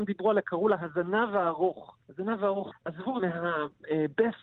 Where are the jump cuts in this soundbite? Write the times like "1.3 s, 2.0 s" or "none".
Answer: 2.0 s, 2.7 s, 3.2 s